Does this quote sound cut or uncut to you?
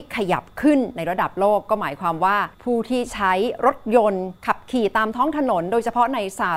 cut